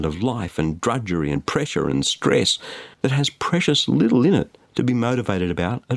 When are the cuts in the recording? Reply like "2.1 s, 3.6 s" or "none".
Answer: 2.9 s